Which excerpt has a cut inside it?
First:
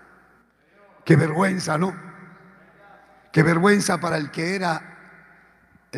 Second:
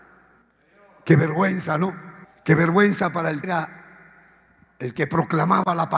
second; 2 cuts; at 2.2 s, 3.4 s

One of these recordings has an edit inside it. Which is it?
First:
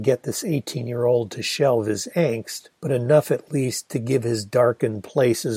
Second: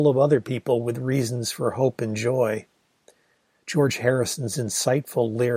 first; 1 cut; at 2.8 s

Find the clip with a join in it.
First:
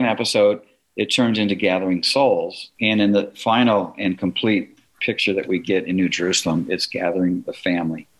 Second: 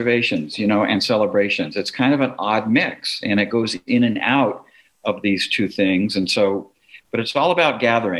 first; 2 cuts; at 2.7 s, 5.0 s

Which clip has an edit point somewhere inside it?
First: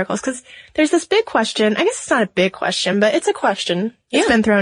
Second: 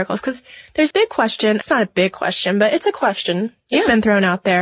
second; 2 cuts; at 0.9 s, 1.6 s

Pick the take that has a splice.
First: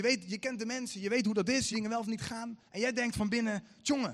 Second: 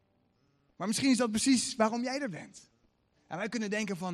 first; 2 cuts; at 1.7 s, 2.7 s

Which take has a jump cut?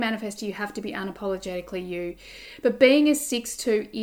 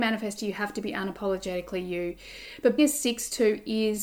second; 1 cut; at 2.8 s

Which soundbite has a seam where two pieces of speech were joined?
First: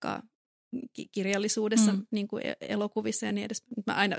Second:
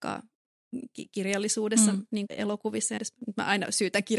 second; 2 cuts; at 2.3 s, 3.0 s

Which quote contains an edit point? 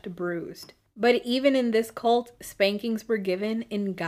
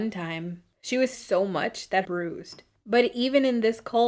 second; 2 cuts; at 1.1 s, 2.0 s

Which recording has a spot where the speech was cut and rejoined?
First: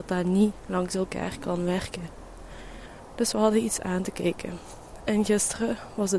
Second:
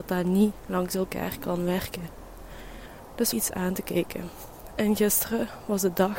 second; 1 cut; at 3.3 s

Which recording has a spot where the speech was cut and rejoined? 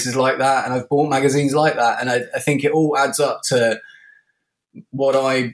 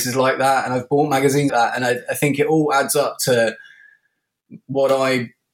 second; 1 cut; at 1.5 s

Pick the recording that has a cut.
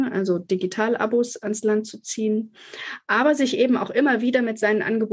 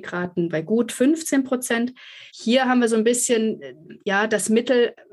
second; 1 cut; at 2.3 s

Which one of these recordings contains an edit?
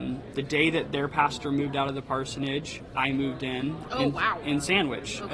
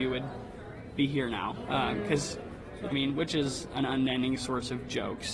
second; 1 cut; at 2.9 s

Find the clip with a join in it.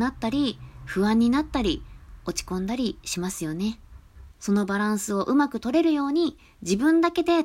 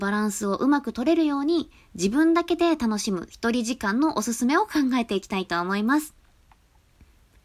first; 1 cut; at 4.3 s

